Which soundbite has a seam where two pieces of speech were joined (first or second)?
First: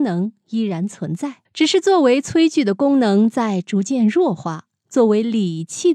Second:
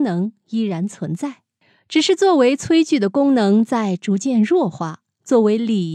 first